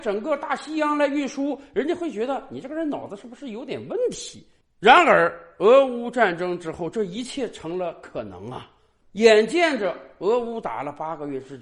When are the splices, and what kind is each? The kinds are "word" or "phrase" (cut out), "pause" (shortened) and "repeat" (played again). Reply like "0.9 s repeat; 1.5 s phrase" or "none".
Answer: none